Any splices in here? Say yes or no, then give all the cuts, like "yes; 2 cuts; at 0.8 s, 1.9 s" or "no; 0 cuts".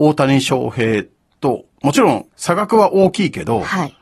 yes; 2 cuts; at 1.7 s, 2.3 s